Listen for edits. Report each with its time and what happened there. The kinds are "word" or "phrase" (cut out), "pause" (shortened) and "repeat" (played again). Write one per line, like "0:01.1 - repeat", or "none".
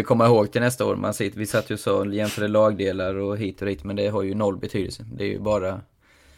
none